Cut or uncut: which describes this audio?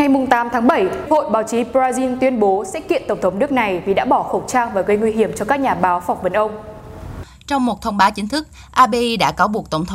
cut